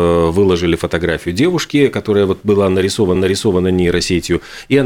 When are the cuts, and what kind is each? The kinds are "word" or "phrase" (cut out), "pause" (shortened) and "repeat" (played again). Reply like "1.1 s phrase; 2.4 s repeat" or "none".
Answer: 3.2 s repeat